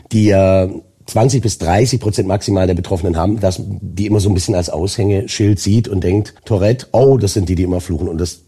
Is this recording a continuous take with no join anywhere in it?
no; 1 cut; at 6.4 s

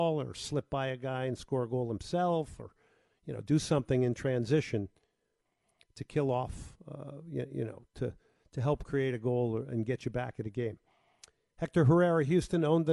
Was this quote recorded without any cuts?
yes; 0 cuts

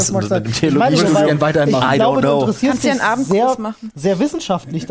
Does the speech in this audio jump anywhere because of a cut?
no; 0 cuts

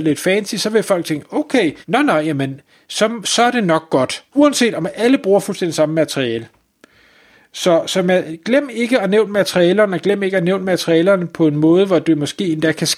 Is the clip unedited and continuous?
no; 2 cuts; at 1.8 s, 4.3 s

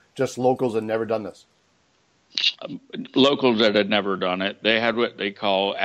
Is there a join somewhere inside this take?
no; 0 cuts

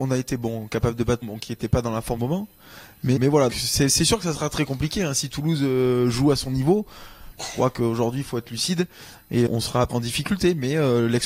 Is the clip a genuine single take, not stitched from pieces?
no; 6 cuts; at 1.2 s, 2.2 s, 3.2 s, 3.5 s, 9.5 s, 9.9 s

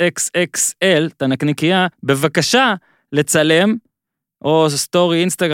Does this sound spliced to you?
yes; 1 cut; at 1.9 s

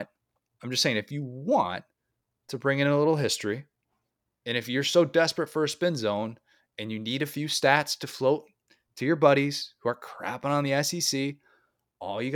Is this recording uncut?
yes; 0 cuts

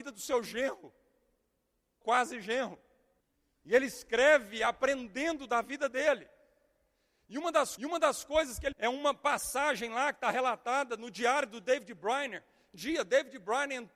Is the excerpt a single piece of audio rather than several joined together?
no; 5 cuts; at 2.0 s, 3.2 s, 7.8 s, 8.7 s, 12.7 s

